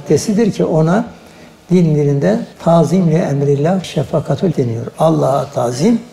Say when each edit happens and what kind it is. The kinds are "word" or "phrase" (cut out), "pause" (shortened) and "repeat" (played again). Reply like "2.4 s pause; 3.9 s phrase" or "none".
2.5 s pause; 3.8 s word; 4.5 s word